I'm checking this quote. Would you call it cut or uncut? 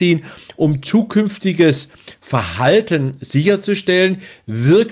uncut